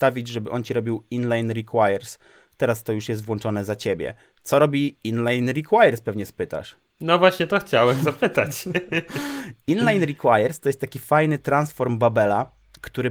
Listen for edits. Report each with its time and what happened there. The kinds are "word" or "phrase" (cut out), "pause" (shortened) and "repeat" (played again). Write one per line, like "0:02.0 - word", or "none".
none